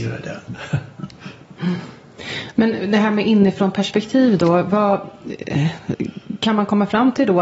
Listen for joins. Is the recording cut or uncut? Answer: uncut